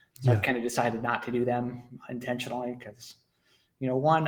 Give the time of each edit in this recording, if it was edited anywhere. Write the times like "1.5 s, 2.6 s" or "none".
none